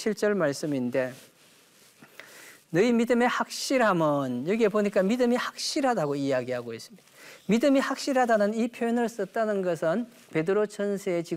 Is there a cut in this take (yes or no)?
no